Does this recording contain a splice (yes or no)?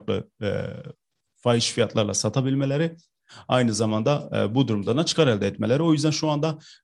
no